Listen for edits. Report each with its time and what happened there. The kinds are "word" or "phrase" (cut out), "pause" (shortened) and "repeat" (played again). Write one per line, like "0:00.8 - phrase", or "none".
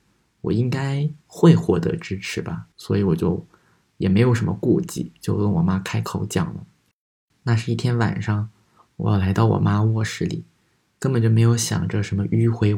0:01.2 - pause
0:02.7 - pause